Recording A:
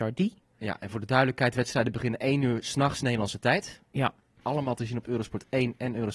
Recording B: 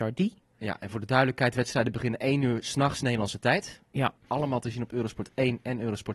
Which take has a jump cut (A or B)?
B